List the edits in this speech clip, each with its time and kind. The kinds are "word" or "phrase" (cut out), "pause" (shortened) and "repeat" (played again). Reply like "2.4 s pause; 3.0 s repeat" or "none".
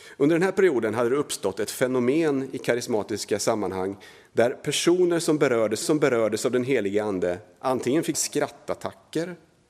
5.8 s repeat; 8.1 s word